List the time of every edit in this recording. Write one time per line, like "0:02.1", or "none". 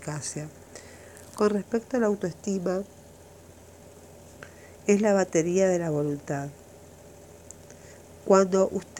none